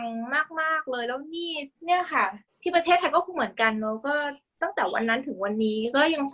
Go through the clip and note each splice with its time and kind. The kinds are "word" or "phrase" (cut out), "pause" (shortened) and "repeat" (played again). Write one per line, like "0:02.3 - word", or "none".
0:01.7 - pause